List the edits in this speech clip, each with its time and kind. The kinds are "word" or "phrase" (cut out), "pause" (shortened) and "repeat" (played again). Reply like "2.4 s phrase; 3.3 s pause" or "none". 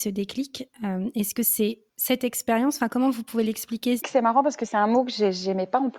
1.9 s pause; 4.0 s phrase